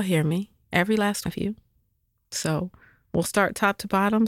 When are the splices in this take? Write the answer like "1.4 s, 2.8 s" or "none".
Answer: 1.3 s